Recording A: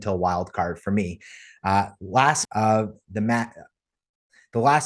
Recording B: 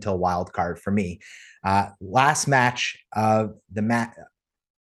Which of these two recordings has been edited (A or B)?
A